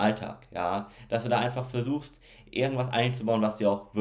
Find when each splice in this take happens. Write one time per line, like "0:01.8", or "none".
none

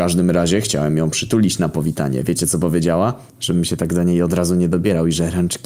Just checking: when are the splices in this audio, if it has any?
0:03.3

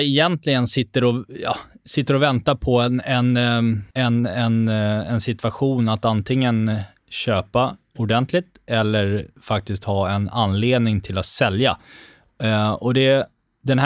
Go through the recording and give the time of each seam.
0:03.9

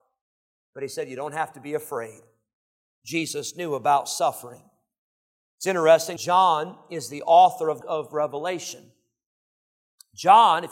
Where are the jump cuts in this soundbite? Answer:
0:06.2
0:07.8

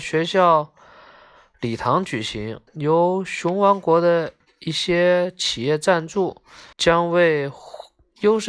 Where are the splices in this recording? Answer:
0:02.7
0:04.4
0:06.7

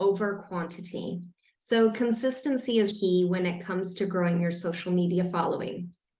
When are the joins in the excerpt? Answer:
0:02.9

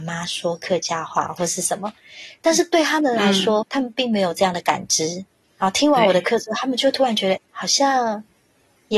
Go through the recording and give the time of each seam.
0:03.6
0:07.4

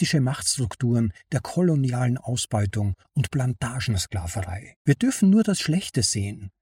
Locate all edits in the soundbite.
0:04.8

